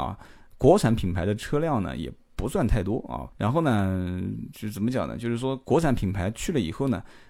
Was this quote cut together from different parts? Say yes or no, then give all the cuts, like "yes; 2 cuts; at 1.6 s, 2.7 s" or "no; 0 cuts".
yes; 1 cut; at 3.3 s